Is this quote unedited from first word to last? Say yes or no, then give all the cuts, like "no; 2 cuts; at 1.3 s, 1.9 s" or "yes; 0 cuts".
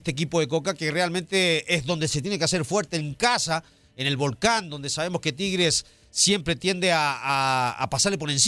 yes; 0 cuts